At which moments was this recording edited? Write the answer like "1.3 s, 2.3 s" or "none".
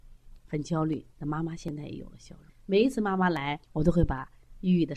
1.1 s, 2.5 s, 3.6 s